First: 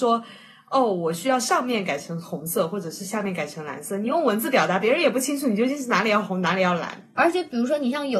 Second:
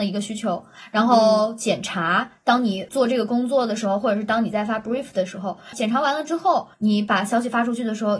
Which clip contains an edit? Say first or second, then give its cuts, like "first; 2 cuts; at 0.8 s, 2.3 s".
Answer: second; 1 cut; at 6.7 s